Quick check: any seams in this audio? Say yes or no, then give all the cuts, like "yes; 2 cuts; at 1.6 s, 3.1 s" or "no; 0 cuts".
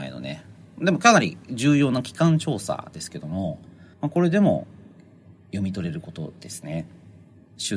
yes; 2 cuts; at 3.9 s, 5.4 s